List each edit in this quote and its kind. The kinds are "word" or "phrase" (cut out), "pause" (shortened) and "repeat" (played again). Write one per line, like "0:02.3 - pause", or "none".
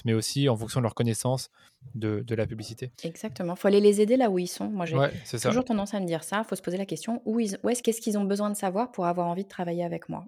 0:02.9 - pause
0:04.9 - word
0:07.8 - phrase